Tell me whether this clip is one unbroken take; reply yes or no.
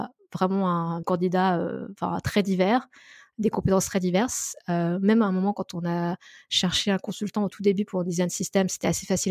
no